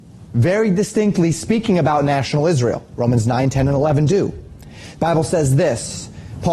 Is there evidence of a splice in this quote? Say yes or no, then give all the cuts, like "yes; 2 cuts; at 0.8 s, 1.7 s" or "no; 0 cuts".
no; 0 cuts